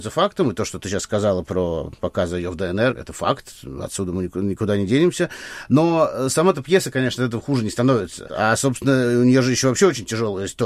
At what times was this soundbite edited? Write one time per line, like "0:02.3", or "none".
0:02.9